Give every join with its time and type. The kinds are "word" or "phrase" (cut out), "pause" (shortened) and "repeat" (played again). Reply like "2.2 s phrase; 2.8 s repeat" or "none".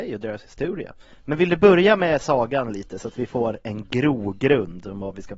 none

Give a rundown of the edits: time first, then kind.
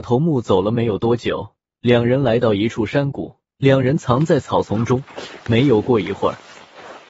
1.7 s pause; 3.5 s pause; 5.4 s pause

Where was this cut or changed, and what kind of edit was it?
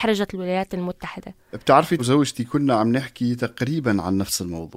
2.0 s phrase

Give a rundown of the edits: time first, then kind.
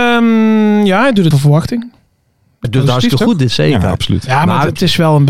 1.3 s word; 2.6 s word; 3.5 s word

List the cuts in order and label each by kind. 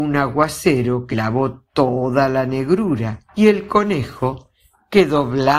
1.1 s word; 3.3 s pause

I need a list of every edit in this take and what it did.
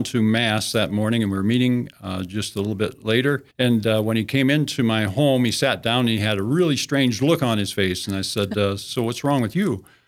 3.5 s pause

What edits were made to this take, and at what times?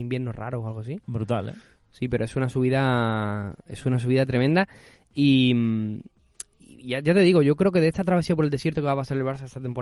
none

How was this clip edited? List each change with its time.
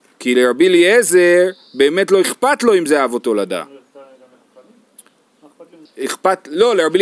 5.9 s pause

